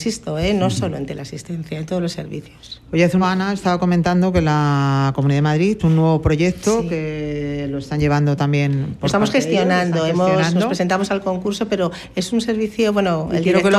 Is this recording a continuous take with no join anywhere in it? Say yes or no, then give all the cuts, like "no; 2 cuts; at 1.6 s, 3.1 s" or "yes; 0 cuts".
no; 2 cuts; at 3.2 s, 5.8 s